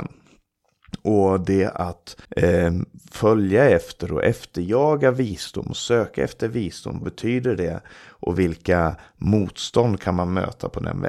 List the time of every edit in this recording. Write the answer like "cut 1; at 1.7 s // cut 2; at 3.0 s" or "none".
cut 1; at 2.2 s // cut 2; at 7.0 s